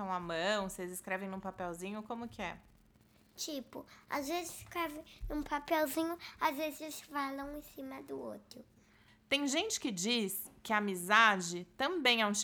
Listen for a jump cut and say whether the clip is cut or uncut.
uncut